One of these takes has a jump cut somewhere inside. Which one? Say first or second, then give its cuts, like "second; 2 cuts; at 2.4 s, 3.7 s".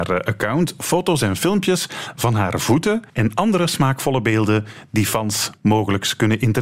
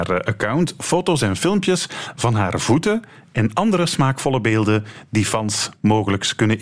first; 1 cut; at 3.1 s